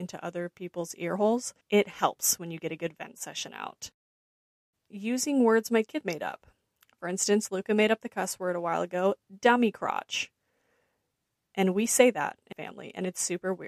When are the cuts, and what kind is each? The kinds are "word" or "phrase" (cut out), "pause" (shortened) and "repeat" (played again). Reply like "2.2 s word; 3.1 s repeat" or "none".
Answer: 1.6 s pause; 6.0 s word; 12.5 s word